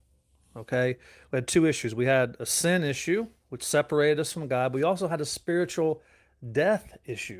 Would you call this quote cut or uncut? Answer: uncut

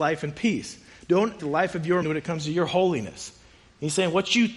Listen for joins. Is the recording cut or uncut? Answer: cut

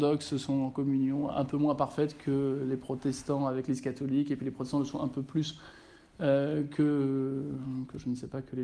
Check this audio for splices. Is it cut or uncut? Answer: uncut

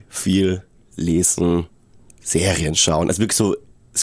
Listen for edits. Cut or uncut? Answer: uncut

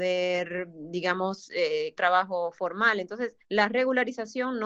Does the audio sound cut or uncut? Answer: cut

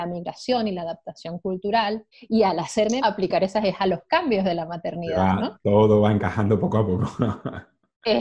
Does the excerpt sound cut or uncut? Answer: cut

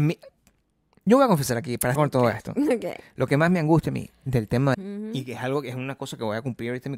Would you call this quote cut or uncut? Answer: cut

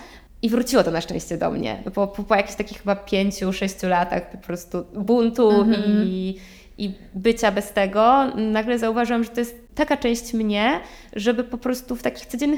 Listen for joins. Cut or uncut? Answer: uncut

